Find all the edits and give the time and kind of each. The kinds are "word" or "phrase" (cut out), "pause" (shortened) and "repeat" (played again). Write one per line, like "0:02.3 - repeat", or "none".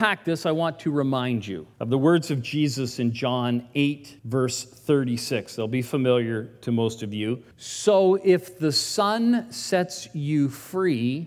0:01.7 - pause
0:04.2 - pause
0:07.5 - pause